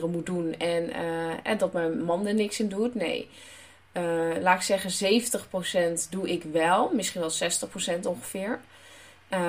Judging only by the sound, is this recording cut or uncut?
uncut